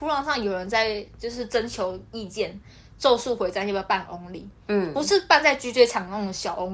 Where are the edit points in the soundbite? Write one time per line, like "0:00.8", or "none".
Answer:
none